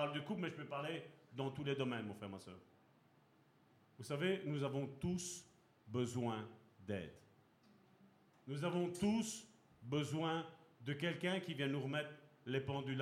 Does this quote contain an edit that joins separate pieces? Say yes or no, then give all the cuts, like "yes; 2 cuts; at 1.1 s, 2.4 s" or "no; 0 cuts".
no; 0 cuts